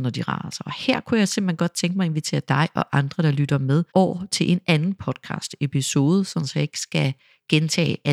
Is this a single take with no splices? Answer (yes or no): no